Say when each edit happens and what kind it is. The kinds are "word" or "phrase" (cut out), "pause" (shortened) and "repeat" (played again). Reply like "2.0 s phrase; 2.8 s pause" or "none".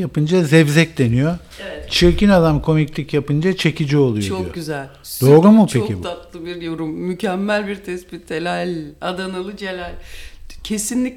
none